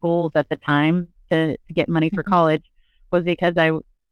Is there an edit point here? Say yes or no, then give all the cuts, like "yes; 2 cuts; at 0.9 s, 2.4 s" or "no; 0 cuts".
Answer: no; 0 cuts